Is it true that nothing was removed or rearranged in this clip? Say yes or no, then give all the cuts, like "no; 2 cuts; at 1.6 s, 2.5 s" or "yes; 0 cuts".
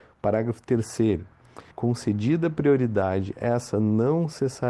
no; 1 cut; at 1.7 s